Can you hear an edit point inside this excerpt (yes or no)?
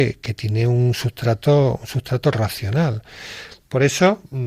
no